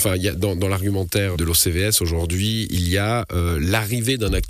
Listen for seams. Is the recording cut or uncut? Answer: cut